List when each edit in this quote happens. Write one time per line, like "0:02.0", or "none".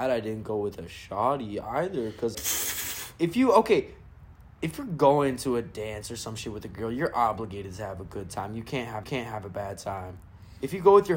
0:02.3
0:09.0